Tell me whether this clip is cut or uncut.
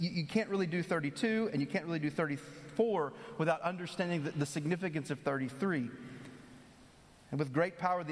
uncut